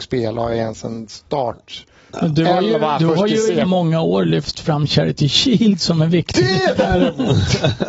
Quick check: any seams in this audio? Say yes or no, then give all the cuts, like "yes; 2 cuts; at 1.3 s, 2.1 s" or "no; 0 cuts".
yes; 1 cut; at 3.6 s